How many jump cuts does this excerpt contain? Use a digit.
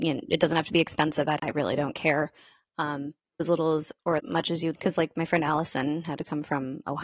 4